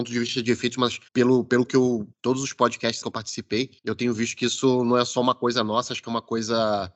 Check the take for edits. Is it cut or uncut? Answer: cut